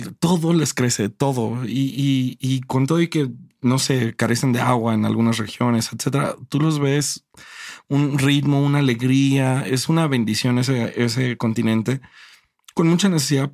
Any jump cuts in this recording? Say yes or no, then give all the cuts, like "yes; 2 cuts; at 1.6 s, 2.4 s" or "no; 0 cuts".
no; 0 cuts